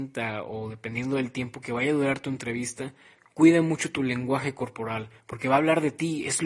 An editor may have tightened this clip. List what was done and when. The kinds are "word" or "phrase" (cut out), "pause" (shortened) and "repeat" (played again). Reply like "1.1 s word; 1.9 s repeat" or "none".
none